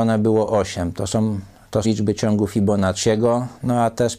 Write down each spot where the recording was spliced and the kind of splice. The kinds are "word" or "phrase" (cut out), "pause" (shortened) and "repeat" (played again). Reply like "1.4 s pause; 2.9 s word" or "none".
1.8 s word